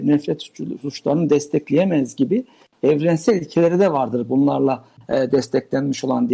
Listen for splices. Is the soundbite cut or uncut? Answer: uncut